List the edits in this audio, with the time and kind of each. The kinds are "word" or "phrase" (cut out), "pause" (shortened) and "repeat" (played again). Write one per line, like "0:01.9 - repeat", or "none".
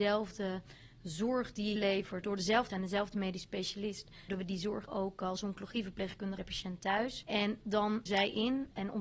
0:01.8 - word
0:02.2 - word
0:02.7 - word
0:04.3 - word
0:04.9 - word
0:06.4 - word
0:08.1 - word